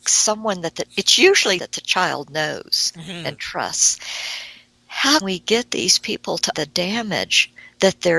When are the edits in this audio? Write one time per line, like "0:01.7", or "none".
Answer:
0:01.6
0:05.2
0:06.5